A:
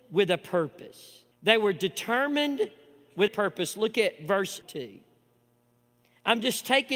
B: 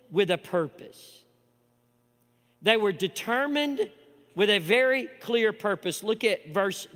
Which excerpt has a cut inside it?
A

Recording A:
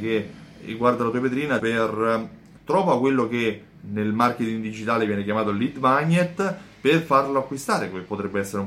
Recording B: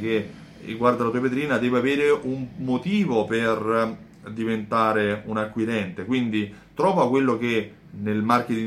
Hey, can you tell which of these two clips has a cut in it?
A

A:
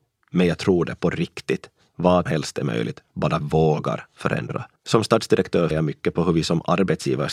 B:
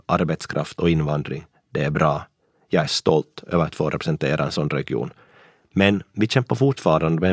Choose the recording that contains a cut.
A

